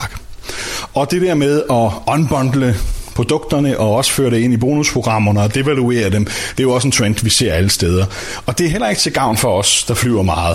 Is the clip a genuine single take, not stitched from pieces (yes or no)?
yes